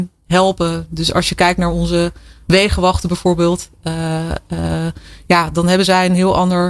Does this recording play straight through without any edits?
yes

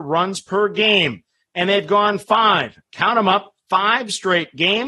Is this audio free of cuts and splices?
yes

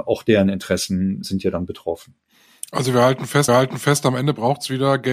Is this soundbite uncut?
no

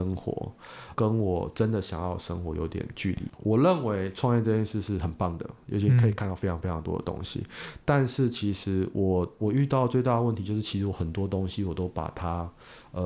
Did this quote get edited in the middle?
yes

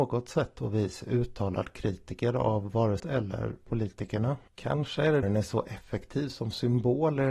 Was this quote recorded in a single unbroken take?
no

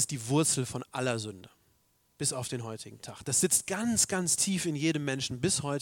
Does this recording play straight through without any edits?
yes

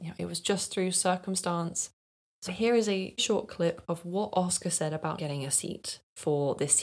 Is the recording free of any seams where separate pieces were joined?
no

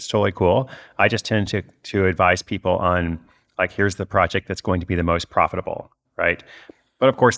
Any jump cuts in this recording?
no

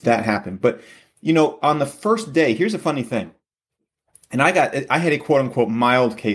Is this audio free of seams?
yes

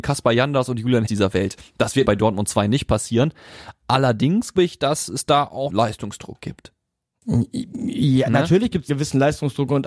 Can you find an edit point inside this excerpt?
yes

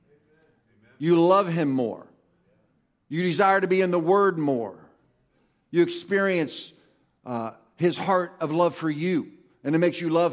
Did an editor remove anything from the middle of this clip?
no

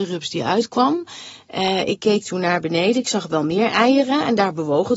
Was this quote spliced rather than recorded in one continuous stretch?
no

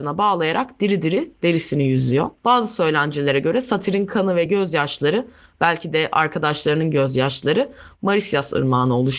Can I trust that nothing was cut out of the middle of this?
yes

